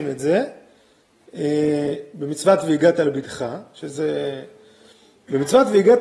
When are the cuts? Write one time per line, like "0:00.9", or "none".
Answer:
none